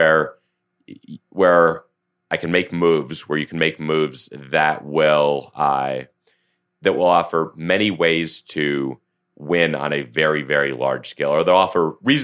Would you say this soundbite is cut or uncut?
uncut